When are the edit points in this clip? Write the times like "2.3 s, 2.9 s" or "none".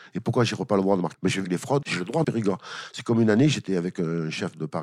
1.1 s, 1.4 s, 1.8 s, 2.2 s

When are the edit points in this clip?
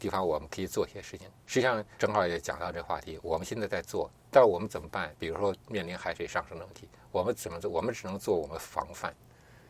2.0 s

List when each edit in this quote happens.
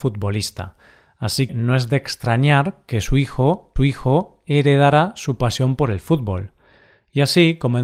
1.5 s, 3.8 s

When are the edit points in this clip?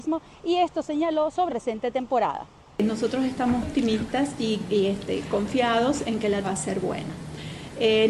1.5 s, 3.6 s, 6.4 s

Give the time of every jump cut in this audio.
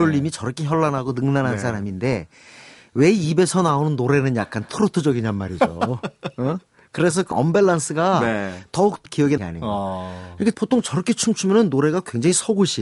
7.3 s, 9.1 s, 9.4 s, 10.5 s

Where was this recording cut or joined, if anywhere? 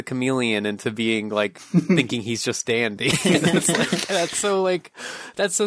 4.3 s

